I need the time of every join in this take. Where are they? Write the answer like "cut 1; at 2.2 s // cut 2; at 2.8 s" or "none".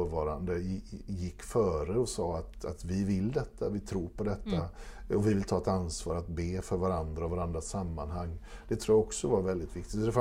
none